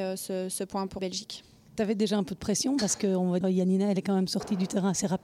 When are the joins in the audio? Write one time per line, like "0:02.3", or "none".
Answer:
0:01.0
0:03.4